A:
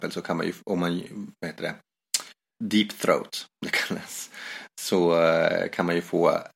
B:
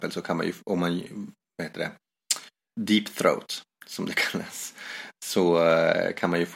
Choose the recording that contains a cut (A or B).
A